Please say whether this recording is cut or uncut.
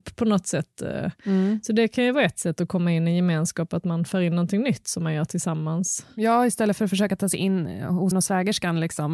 cut